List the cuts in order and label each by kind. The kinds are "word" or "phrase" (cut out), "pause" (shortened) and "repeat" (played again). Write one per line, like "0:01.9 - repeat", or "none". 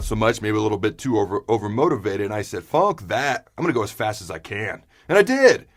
none